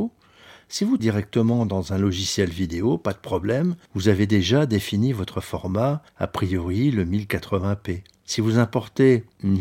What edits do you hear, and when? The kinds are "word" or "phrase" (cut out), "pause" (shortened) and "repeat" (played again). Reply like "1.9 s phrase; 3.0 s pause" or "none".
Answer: 1.0 s word